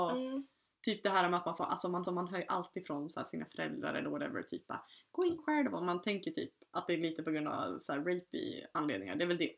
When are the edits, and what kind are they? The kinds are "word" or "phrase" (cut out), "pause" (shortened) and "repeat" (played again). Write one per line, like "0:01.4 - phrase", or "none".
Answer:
0:02.1 - repeat
0:05.4 - word